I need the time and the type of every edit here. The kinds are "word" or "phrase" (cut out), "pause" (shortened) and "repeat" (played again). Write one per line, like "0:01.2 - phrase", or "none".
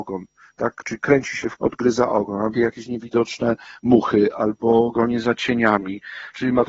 0:01.6 - word
0:02.5 - word